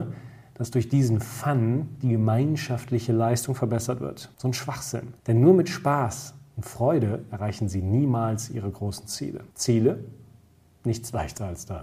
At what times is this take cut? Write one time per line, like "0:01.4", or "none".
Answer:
0:04.3
0:05.2
0:09.5